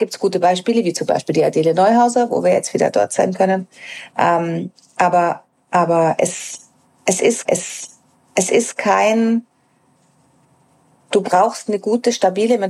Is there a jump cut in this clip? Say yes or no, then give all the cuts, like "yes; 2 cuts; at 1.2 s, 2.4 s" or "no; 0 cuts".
yes; 1 cut; at 7.5 s